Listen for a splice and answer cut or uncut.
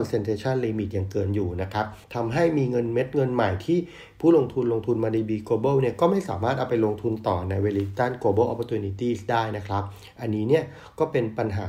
cut